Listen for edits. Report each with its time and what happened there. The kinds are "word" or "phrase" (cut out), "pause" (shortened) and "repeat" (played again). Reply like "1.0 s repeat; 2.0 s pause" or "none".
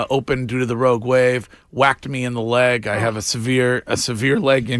none